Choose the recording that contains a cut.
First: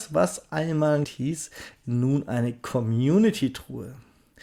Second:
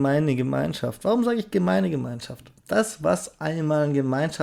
first; 2 cuts; at 1.0 s, 1.8 s

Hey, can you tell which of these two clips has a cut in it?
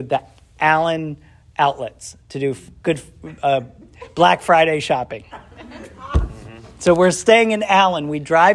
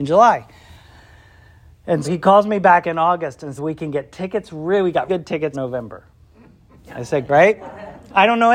second; 6 cuts; at 2.0 s, 2.8 s, 3.6 s, 5.1 s, 5.5 s, 7.3 s

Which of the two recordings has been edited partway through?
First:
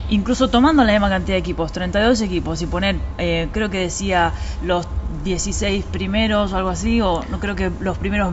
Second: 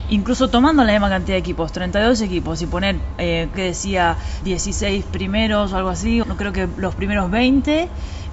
second; 3 cuts; at 3.5 s, 4.4 s, 6.2 s

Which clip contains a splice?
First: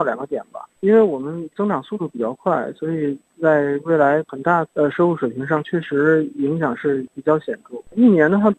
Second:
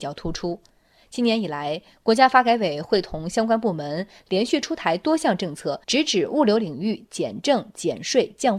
second; 1 cut; at 5.8 s

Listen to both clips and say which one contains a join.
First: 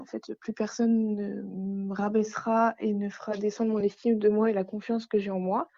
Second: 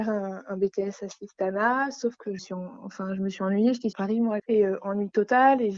second; 3 cuts; at 2.4 s, 3.9 s, 4.4 s

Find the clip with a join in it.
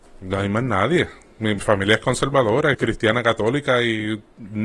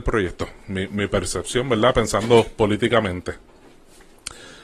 first; 2 cuts; at 1.6 s, 2.7 s

